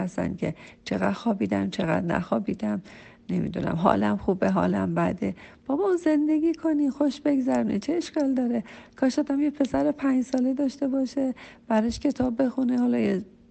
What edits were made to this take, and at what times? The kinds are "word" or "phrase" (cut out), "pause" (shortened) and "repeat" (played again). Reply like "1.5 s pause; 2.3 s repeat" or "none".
none